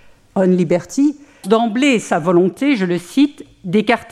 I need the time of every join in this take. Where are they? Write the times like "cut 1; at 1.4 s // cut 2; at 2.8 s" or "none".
cut 1; at 1.4 s